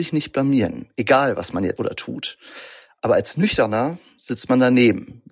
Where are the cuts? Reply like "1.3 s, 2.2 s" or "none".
1.8 s

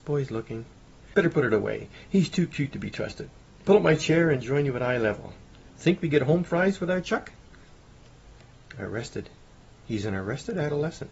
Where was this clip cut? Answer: none

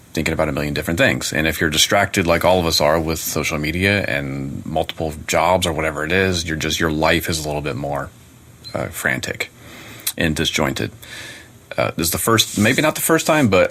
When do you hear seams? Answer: none

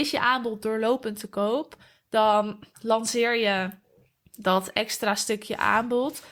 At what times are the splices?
none

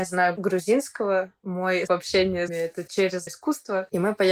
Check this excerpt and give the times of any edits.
1.9 s, 2.5 s, 3.3 s

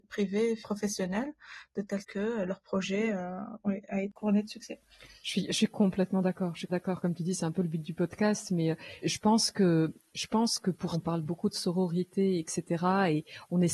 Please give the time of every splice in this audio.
2.0 s, 6.7 s, 9.0 s, 10.9 s

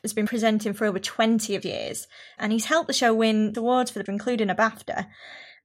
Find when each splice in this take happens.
1.6 s, 3.5 s, 4.1 s

